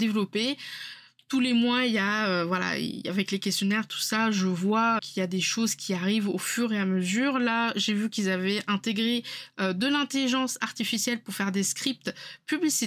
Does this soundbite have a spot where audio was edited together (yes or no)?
yes